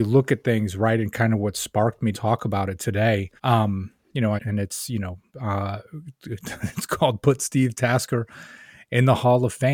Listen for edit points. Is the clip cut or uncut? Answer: cut